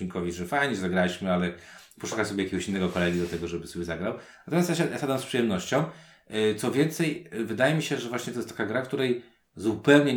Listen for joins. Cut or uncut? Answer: uncut